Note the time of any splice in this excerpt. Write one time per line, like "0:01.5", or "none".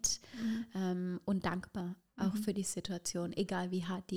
none

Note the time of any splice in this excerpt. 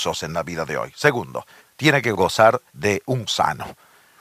0:01.6
0:02.7
0:03.3

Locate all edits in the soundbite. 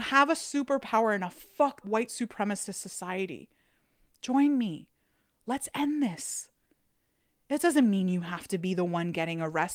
0:01.8

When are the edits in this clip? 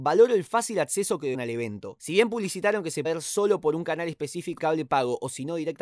0:01.3
0:03.0
0:04.6

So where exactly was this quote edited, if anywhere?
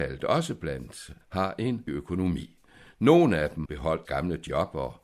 0:01.2
0:01.9
0:03.7
0:04.0

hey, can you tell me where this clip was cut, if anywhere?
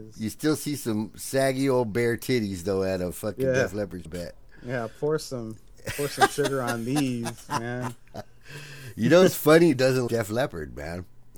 0:04.1
0:09.7
0:10.1

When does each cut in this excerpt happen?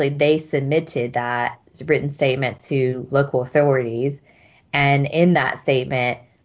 none

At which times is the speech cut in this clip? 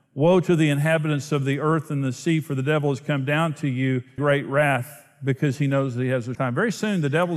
0:04.2
0:06.3

